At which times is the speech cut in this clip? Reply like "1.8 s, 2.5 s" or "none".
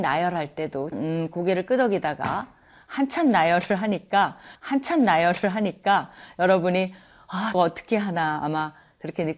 0.9 s, 4.6 s, 7.5 s